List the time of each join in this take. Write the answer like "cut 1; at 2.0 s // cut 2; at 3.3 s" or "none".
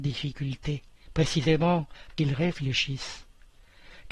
cut 1; at 2.2 s